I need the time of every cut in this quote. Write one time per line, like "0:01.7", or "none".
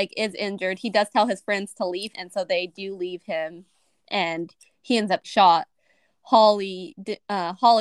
0:02.1
0:05.2